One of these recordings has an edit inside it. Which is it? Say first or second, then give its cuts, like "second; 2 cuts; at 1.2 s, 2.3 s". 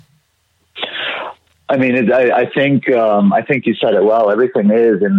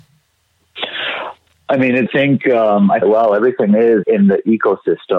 second; 3 cuts; at 2.1 s, 3.0 s, 4.0 s